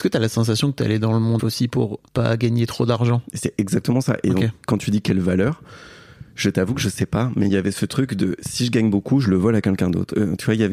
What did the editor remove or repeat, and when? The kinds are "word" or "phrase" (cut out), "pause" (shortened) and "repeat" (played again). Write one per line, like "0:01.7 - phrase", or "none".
0:01.4 - word
0:02.1 - pause